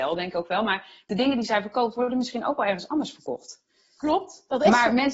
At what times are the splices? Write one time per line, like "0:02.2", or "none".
none